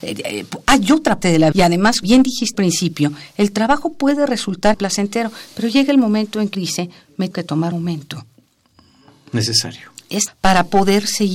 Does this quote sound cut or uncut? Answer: cut